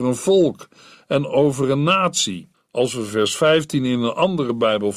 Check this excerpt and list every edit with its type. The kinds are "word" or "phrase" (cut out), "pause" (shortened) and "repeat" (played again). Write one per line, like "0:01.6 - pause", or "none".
0:02.5 - pause

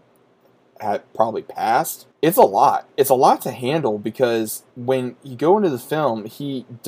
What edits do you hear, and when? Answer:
0:02.1 - pause
0:04.7 - pause

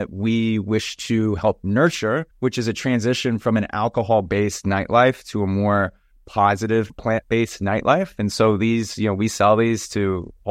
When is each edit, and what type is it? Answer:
0:02.3 - pause

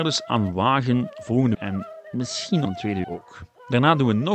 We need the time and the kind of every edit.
0:01.5 - word
0:02.6 - word
0:03.0 - word

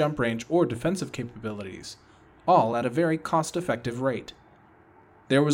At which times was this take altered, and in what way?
none

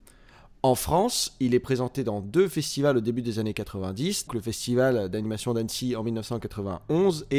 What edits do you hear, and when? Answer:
0:04.3 - word

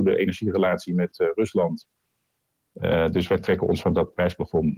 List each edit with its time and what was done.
none

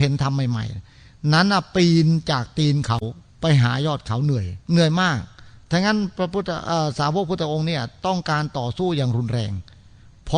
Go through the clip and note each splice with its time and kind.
0:03.3 - pause
0:04.6 - pause

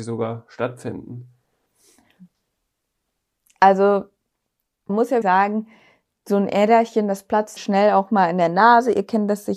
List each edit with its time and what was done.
0:04.9 - word
0:05.2 - word
0:07.6 - word

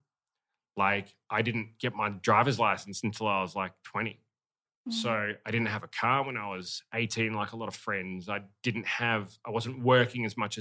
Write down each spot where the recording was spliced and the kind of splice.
none

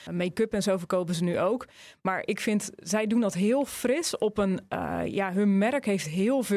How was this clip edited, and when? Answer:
none

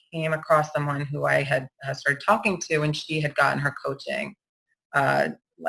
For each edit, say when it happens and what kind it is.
none

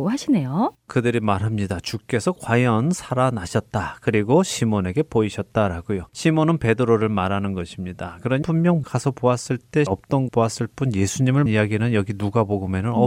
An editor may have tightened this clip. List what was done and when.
0:06.1 - pause
0:08.4 - word
0:08.8 - word
0:09.9 - word
0:10.3 - word
0:11.5 - word

